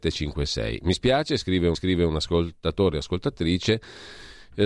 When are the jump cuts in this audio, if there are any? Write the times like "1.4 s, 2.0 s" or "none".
1.7 s